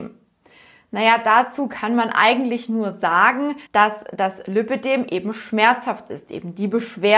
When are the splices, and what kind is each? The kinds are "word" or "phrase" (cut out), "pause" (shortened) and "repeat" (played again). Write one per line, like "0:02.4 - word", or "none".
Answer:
0:03.7 - pause

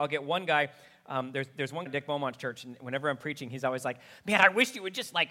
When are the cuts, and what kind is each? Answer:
0:01.9 - phrase

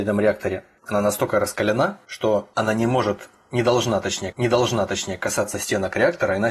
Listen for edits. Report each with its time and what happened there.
0:04.3 - repeat

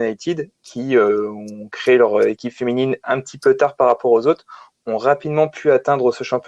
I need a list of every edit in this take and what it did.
none

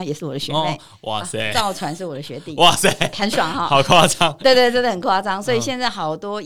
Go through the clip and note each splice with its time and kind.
0:03.1 - word

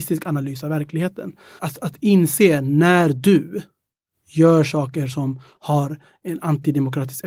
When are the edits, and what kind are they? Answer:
none

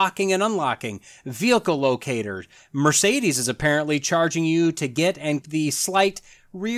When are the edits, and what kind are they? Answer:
0:05.4 - word

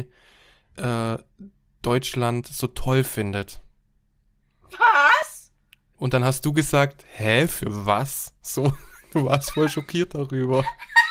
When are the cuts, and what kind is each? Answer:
none

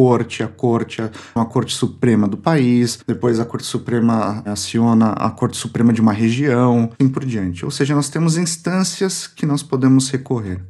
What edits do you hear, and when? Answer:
0:01.4 - word
0:07.0 - word

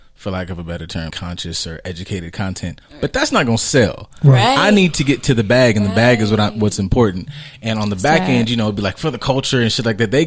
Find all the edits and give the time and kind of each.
0:01.1 - word

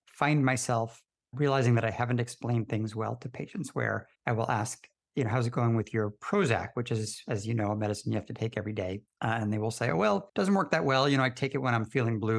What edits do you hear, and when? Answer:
0:04.1 - pause
0:09.1 - pause
0:10.3 - pause

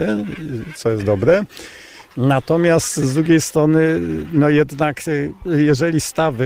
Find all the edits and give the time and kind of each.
none

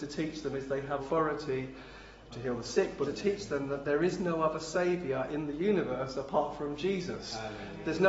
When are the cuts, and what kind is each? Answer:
0:01.0 - word
0:02.3 - word
0:03.0 - word

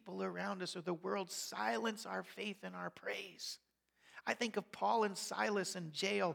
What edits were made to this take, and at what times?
none

